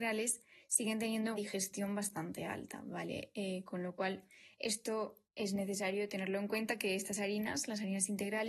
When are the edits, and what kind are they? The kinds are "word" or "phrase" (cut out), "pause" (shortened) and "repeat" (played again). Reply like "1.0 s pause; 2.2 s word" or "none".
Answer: 1.4 s word; 5.3 s pause